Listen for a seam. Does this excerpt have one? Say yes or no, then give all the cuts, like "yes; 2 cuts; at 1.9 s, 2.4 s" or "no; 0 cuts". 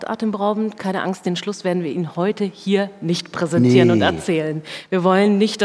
no; 0 cuts